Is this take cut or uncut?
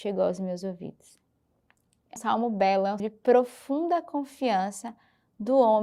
cut